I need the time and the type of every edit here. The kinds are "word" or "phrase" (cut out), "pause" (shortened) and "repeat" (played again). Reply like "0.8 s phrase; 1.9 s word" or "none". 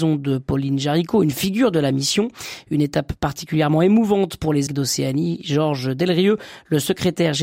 4.7 s word